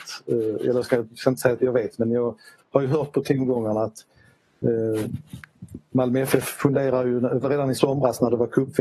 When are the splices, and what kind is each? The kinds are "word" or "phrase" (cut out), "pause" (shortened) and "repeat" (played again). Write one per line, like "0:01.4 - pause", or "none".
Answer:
0:01.6 - word
0:07.4 - word